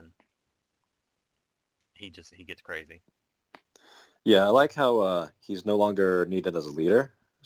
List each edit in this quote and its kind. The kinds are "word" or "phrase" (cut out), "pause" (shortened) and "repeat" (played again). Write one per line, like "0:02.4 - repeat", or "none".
none